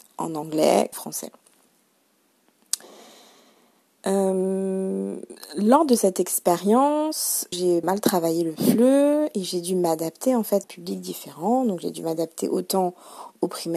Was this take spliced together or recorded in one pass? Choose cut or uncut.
cut